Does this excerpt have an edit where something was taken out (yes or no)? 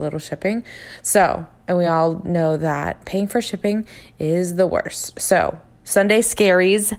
no